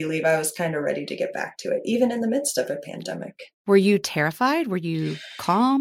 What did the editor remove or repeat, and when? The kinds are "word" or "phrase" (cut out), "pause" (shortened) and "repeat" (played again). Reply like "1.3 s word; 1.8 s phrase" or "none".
3.5 s pause